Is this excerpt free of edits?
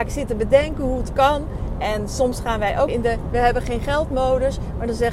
no; 1 cut; at 2.9 s

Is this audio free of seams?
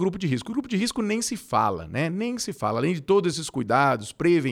yes; 0 cuts

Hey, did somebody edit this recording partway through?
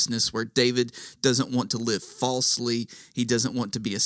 no; 0 cuts

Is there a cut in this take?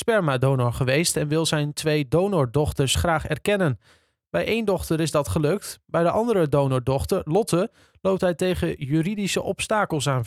no; 0 cuts

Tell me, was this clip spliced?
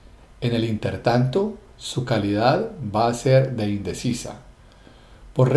no; 0 cuts

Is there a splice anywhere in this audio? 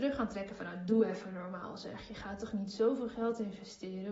no; 0 cuts

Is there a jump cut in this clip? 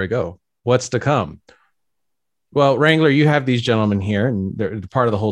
no; 0 cuts

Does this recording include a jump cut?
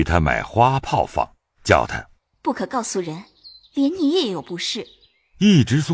no; 0 cuts

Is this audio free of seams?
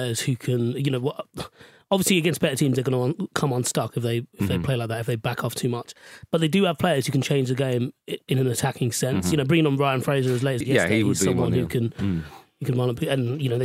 no; 1 cut; at 10.6 s

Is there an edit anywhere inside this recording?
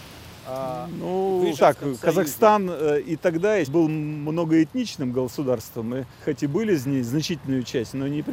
yes; 3 cuts; at 1.6 s, 3.7 s, 6.2 s

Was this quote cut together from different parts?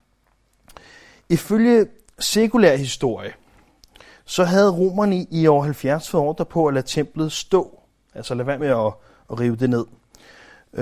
no; 0 cuts

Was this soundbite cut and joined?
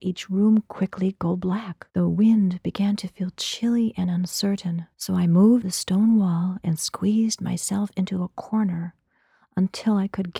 yes; 3 cuts; at 1.9 s, 4.9 s, 5.6 s

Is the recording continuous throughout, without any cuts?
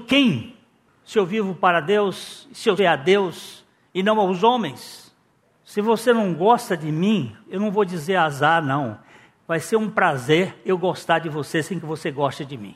no; 1 cut; at 2.8 s

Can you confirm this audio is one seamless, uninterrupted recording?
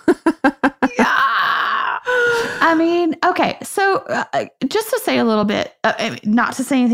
yes; 0 cuts

